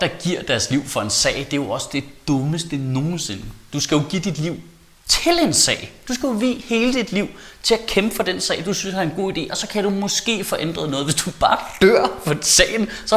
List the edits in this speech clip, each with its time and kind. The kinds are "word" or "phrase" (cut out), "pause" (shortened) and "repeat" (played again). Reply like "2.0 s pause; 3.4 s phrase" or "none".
none